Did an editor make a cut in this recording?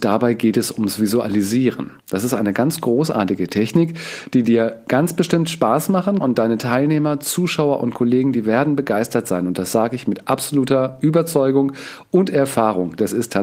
yes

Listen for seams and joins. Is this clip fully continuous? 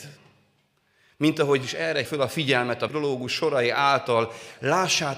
no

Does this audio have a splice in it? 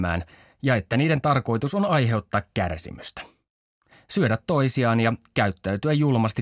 no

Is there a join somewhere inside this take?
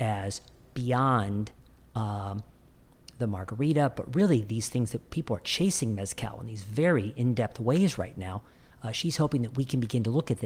no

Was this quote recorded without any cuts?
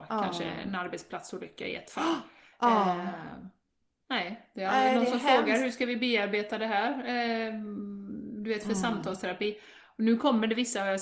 yes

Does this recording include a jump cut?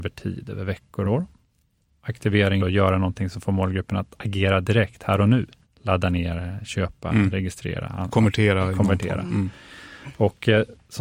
yes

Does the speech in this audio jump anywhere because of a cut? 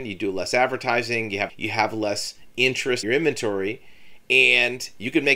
yes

